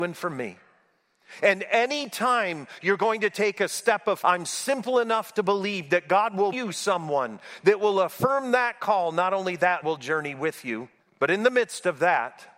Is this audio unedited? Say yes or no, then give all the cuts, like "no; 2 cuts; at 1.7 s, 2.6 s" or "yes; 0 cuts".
no; 4 cuts; at 4.2 s, 6.5 s, 9.8 s, 11.0 s